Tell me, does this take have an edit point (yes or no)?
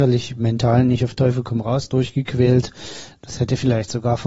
no